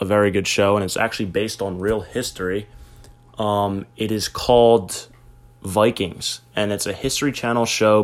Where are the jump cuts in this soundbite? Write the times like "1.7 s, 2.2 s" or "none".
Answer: none

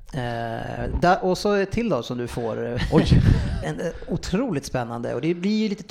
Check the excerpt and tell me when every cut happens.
3.6 s

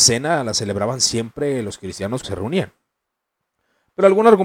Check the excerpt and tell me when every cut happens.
2.2 s

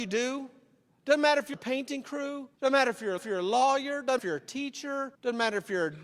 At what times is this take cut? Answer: 1.5 s, 2.5 s, 3.2 s, 4.2 s, 5.1 s

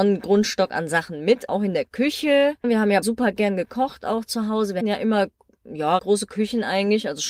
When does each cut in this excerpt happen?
1.5 s, 3.0 s, 4.8 s, 6.0 s

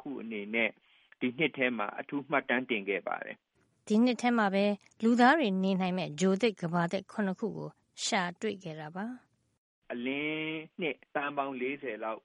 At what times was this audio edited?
none

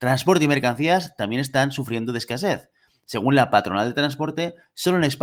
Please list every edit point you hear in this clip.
none

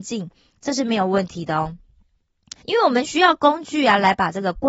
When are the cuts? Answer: 2.6 s

